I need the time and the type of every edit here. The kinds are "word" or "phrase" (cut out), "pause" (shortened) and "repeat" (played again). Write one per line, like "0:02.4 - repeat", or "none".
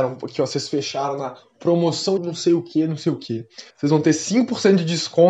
0:02.2 - word
0:03.7 - pause